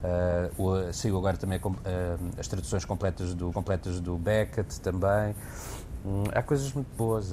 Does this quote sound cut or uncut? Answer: cut